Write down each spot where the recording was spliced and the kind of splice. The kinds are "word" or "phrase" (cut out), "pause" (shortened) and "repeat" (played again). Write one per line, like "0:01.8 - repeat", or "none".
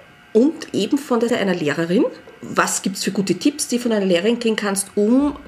0:01.3 - word